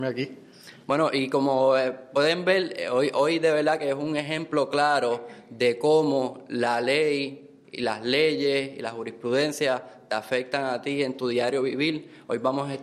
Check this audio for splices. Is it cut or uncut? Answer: uncut